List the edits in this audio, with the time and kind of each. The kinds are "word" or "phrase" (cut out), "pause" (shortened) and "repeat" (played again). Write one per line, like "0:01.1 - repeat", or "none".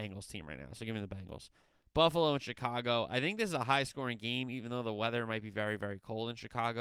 none

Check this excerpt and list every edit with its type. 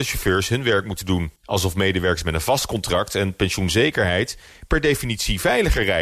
0:01.4 - pause

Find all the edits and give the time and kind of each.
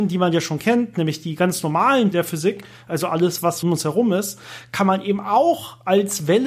0:02.1 - word
0:03.6 - word

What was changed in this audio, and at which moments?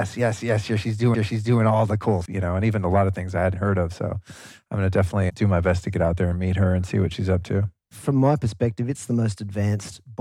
0:01.1 - repeat
0:02.3 - word
0:03.5 - word

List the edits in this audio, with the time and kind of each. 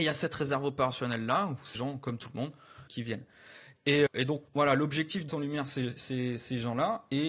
0:01.7 - word
0:02.9 - phrase
0:04.1 - word
0:04.5 - pause
0:05.3 - phrase

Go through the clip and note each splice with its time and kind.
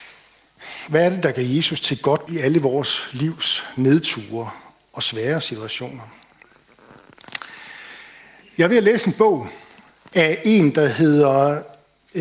0:02.3 - word

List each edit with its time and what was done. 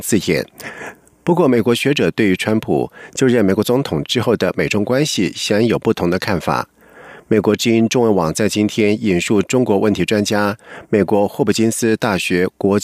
none

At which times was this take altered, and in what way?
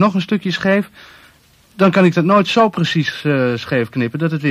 none

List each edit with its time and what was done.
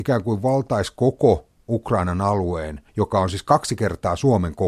0:02.9 - pause

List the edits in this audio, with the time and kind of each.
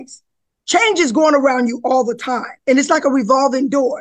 0:02.6 - pause

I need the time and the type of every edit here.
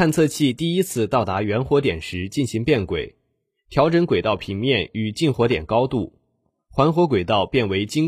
none

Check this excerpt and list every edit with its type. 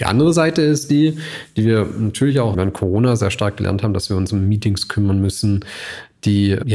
0:02.5 - word

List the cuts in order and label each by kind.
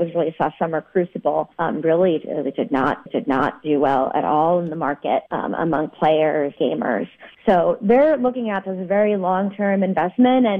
0:01.5 - pause
0:03.1 - repeat
0:05.3 - pause
0:06.6 - word
0:07.3 - pause
0:08.6 - word

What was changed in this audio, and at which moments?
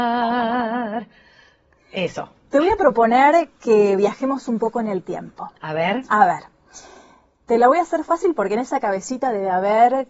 none

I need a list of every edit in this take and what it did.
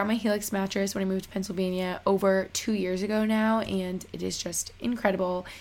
none

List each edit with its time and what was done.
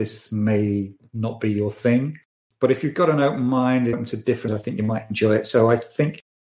0:03.9 - word
0:04.5 - word

